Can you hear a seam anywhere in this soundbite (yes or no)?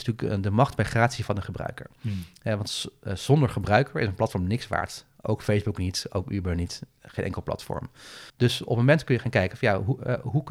yes